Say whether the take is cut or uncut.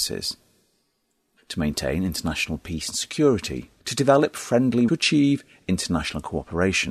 cut